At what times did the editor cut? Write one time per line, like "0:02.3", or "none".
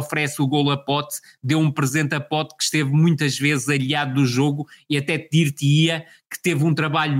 none